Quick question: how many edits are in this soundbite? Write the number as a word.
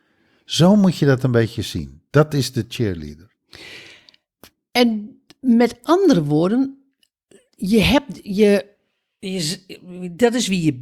zero